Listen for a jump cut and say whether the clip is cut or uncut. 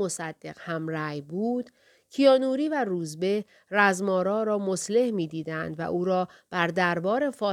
uncut